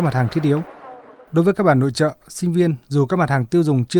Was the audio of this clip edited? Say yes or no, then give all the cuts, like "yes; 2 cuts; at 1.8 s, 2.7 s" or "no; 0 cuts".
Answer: no; 0 cuts